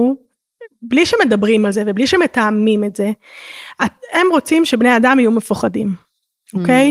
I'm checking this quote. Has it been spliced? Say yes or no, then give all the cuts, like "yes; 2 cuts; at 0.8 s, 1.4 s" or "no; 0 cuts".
no; 0 cuts